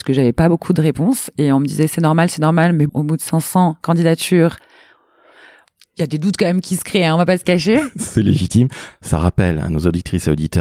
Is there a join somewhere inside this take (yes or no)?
yes